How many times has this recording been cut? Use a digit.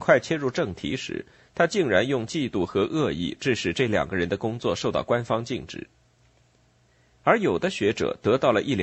0